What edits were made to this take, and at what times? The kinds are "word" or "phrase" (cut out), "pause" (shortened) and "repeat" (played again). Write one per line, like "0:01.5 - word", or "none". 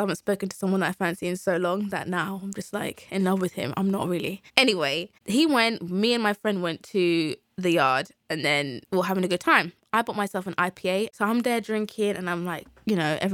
0:04.5 - pause
0:07.4 - pause
0:08.8 - pause